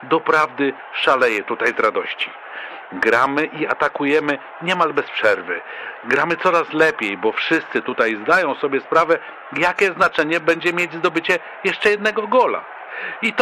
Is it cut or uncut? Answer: uncut